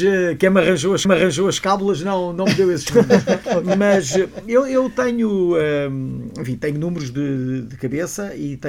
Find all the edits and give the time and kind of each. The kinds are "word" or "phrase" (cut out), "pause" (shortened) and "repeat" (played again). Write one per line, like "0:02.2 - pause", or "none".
0:01.0 - repeat